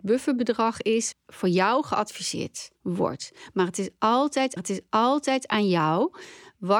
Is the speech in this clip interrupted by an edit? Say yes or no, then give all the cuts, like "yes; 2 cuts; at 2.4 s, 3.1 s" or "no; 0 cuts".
yes; 3 cuts; at 1.1 s, 2.7 s, 4.6 s